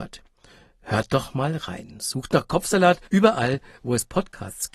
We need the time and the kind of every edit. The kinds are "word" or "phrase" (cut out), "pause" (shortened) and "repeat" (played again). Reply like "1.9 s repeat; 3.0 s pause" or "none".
3.1 s pause